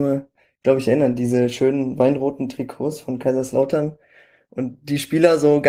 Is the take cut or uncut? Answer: uncut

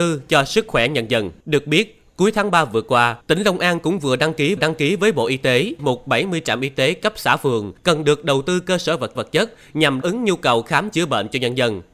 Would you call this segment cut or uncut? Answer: cut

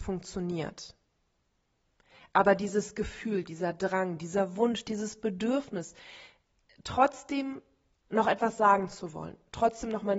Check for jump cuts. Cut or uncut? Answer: uncut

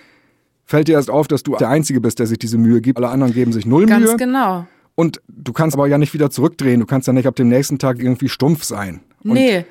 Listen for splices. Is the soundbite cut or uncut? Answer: cut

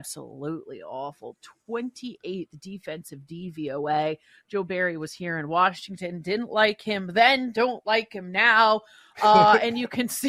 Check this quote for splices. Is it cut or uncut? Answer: uncut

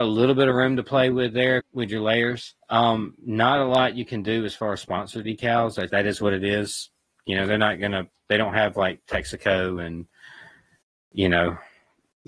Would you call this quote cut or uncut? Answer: cut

